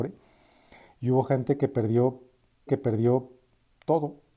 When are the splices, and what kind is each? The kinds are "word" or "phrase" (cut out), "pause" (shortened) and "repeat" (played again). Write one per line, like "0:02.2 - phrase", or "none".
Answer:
0:02.7 - repeat